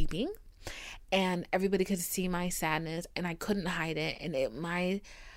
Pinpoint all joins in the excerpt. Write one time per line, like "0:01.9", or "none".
none